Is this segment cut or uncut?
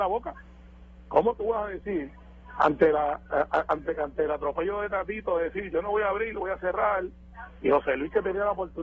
uncut